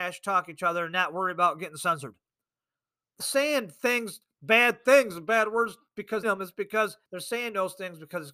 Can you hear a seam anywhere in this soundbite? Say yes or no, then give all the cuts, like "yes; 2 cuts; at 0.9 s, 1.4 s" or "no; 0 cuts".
yes; 3 cuts; at 3.2 s, 6.2 s, 7.1 s